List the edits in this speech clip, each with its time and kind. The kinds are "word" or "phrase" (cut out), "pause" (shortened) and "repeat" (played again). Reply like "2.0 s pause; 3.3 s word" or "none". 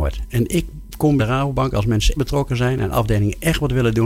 1.2 s word; 2.2 s word